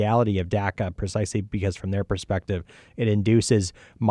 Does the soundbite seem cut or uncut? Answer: uncut